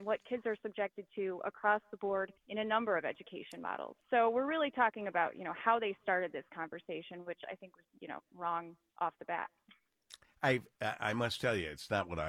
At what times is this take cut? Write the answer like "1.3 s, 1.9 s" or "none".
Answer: 2.4 s, 4.0 s, 7.8 s